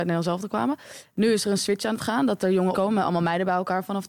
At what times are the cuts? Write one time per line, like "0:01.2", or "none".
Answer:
0:02.7